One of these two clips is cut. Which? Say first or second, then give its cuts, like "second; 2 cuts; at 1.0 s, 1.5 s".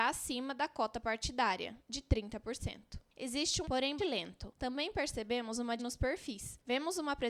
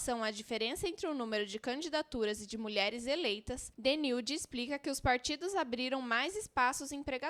first; 3 cuts; at 3.6 s, 4.0 s, 5.8 s